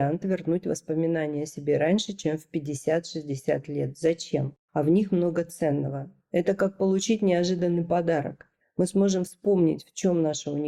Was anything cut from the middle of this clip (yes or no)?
yes